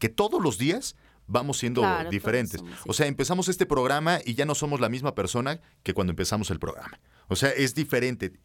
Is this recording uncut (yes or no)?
yes